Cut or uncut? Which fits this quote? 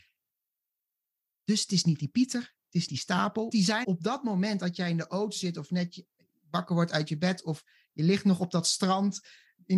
cut